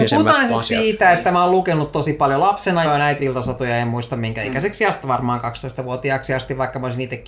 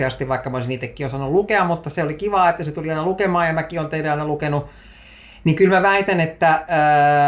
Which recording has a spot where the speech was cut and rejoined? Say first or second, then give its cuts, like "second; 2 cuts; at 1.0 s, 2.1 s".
first; 3 cuts; at 2.8 s, 3.2 s, 5.0 s